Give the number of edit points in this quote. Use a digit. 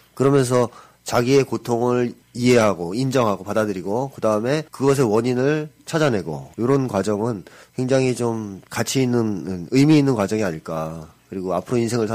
4